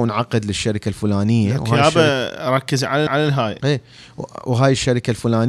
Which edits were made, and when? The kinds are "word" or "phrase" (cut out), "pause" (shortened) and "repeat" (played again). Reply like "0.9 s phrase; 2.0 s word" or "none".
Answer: 3.1 s repeat; 3.6 s word